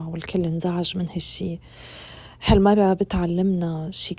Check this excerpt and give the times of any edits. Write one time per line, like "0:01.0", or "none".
none

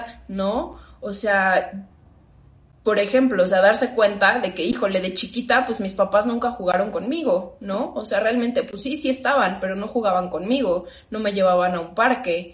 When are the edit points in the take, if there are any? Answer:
none

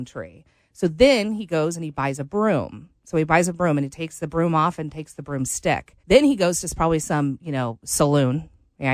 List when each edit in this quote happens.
0:06.0

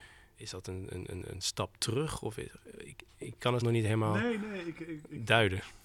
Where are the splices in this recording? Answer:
0:03.6

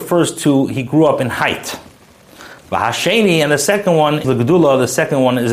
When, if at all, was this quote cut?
0:04.2

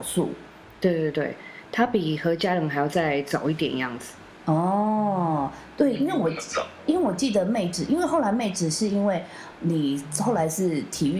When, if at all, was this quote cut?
0:09.6

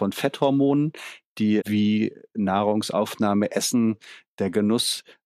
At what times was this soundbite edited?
0:01.6

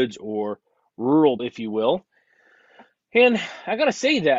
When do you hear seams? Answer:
0:01.4

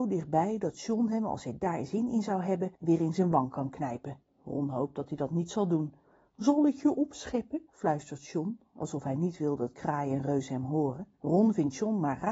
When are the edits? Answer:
0:02.7
0:04.2
0:06.0
0:07.7
0:11.1

